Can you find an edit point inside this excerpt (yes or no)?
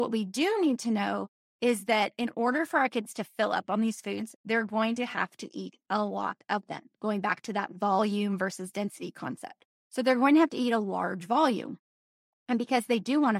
no